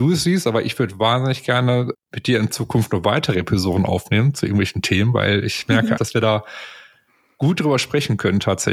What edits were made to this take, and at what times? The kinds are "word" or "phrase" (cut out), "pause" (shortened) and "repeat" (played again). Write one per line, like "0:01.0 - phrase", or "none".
0:01.9 - word
0:06.0 - word